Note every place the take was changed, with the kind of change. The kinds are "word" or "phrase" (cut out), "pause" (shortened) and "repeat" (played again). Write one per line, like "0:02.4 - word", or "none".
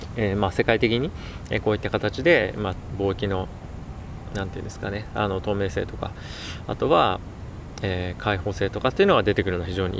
none